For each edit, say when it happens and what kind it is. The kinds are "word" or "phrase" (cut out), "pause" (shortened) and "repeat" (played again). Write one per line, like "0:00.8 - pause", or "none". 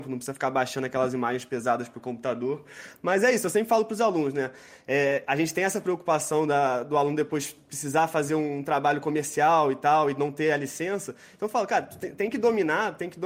none